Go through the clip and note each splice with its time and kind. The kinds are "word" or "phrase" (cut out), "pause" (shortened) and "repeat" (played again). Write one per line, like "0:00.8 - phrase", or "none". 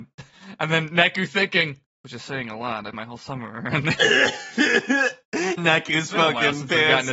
0:02.9 - word
0:05.6 - word